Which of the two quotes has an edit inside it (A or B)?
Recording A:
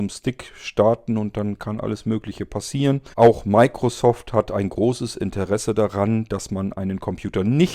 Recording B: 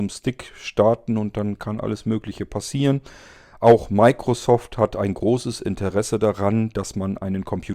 A